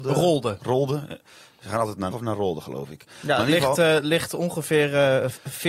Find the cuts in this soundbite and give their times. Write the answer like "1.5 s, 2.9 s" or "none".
2.1 s